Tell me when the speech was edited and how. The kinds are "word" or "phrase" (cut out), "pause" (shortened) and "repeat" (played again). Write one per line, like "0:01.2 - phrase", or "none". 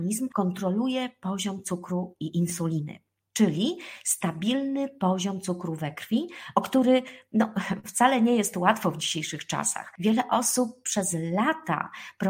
none